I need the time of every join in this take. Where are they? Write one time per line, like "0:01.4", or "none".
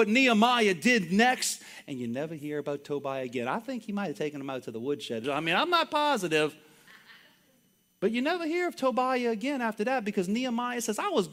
0:05.2